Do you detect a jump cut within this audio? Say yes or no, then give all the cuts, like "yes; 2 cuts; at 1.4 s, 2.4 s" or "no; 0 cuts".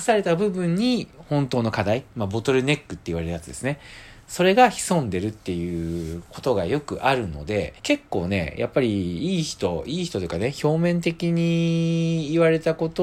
yes; 1 cut; at 7.8 s